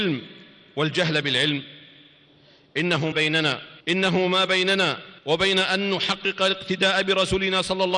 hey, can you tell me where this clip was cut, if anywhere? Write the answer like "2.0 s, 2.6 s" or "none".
3.1 s, 3.8 s, 5.2 s